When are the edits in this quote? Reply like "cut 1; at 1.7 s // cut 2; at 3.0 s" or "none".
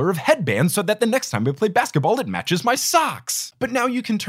none